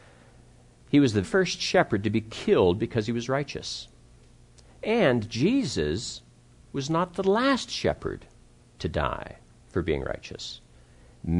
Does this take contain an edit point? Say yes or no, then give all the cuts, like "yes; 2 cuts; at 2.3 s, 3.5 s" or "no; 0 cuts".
yes; 1 cut; at 1.2 s